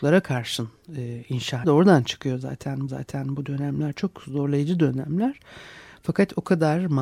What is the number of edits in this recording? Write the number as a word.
two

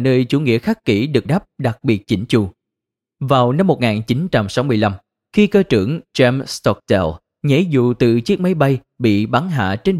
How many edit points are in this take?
one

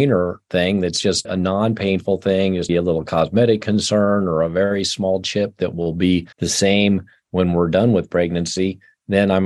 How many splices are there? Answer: three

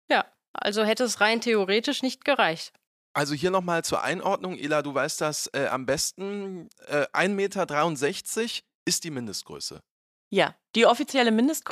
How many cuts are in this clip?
zero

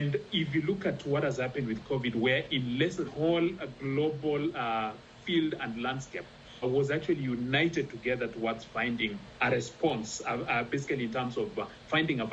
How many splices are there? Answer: three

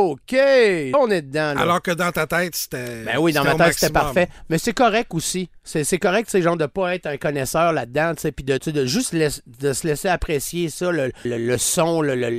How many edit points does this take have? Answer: three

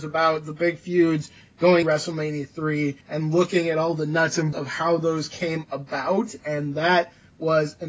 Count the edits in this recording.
three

